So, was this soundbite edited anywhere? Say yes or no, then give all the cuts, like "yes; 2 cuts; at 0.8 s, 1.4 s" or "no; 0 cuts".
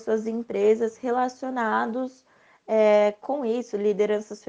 no; 0 cuts